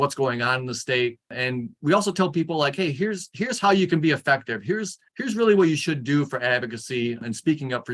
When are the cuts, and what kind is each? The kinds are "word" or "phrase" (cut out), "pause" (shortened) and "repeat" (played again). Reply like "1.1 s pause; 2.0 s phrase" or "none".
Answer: 1.3 s pause; 5.1 s pause